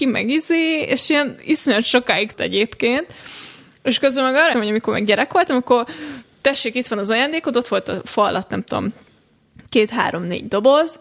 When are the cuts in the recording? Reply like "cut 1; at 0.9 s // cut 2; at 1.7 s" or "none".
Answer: cut 1; at 2.3 s // cut 2; at 4.5 s